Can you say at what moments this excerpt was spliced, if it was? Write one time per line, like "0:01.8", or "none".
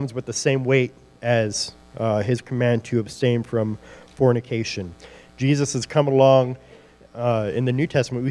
0:01.8